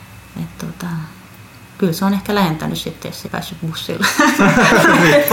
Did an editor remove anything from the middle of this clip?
yes; 1 cut; at 3.2 s

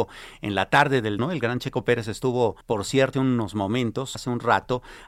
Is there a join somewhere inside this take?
yes; 4 cuts; at 1.2 s, 2.6 s, 3.1 s, 4.1 s

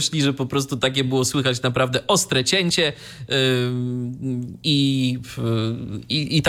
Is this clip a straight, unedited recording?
yes; 0 cuts

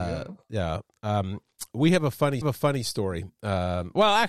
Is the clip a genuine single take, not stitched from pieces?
no; 1 cut; at 2.4 s

